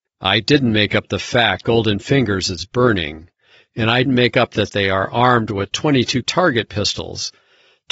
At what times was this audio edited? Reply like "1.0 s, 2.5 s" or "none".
1.6 s, 4.1 s, 6.2 s